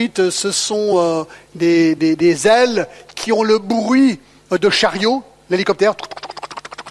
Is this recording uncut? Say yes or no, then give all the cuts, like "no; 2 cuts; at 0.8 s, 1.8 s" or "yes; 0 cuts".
yes; 0 cuts